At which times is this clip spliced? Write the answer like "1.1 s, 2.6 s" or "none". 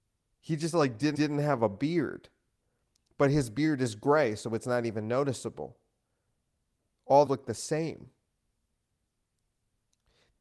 1.1 s, 7.3 s